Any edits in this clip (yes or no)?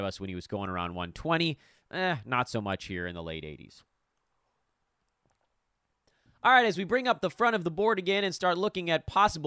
no